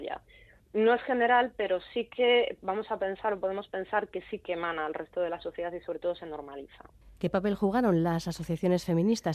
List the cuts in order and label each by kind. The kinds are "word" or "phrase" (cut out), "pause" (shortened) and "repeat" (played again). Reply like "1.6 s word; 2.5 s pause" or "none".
7.0 s pause